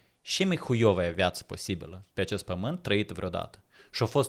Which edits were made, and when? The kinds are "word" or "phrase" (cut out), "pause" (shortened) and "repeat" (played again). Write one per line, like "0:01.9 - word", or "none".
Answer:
0:02.1 - pause